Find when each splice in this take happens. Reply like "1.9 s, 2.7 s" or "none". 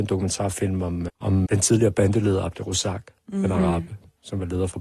1.1 s, 1.5 s